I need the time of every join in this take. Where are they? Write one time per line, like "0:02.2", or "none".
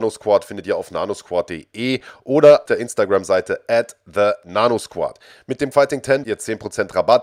0:02.7
0:05.7
0:06.2